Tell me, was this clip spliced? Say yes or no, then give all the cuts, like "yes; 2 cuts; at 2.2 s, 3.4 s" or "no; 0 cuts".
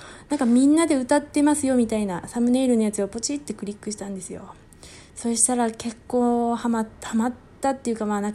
yes; 1 cut; at 6.9 s